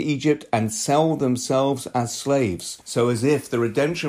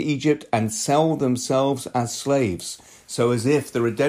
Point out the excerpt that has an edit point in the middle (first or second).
first